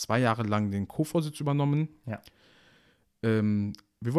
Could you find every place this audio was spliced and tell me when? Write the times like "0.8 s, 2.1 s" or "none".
none